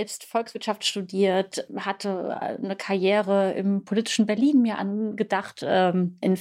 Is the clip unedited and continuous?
yes; 0 cuts

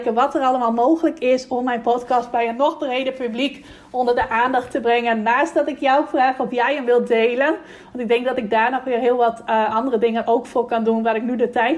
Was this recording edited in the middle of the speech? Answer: no; 0 cuts

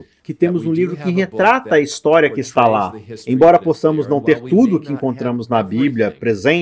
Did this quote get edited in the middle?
no; 0 cuts

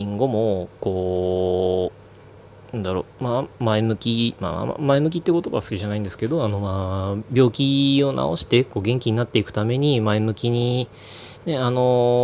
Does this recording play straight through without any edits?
no; 2 cuts; at 3.1 s, 3.5 s

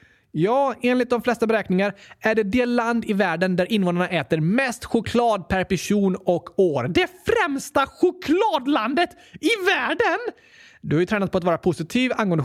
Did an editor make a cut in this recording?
no; 0 cuts

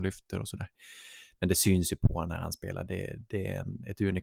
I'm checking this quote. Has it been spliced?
no; 0 cuts

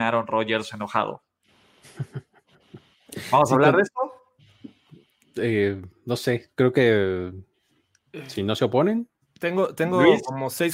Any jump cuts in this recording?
no; 0 cuts

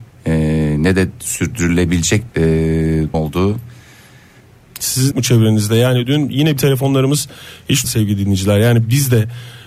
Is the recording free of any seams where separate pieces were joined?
no; 6 cuts; at 2.3 s, 3.1 s, 5.1 s, 6.1 s, 6.6 s, 7.8 s

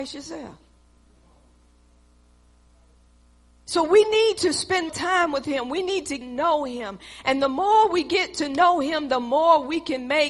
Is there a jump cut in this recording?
yes; 2 cuts; at 4.9 s, 6.2 s

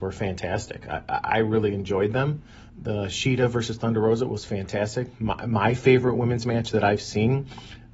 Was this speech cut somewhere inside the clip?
yes; 1 cut; at 2.7 s

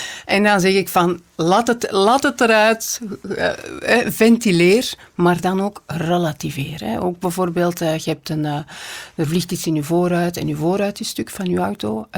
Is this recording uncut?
yes; 0 cuts

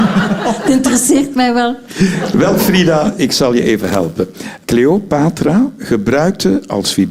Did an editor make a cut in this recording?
no; 0 cuts

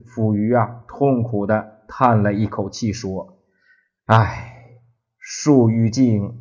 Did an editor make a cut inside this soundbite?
no; 0 cuts

